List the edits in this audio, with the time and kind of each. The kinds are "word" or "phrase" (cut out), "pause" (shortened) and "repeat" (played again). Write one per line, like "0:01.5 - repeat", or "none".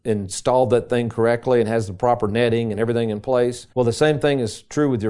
0:03.7 - pause